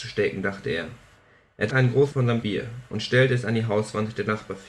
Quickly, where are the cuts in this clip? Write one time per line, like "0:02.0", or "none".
0:01.7
0:02.1
0:02.4